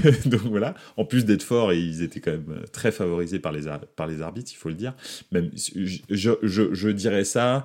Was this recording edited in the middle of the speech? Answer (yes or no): no